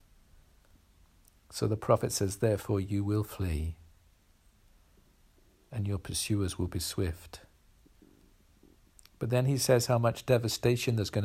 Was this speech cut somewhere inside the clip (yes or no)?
no